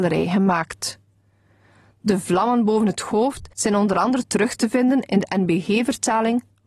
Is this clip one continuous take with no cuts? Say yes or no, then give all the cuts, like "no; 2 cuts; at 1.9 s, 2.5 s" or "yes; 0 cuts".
yes; 0 cuts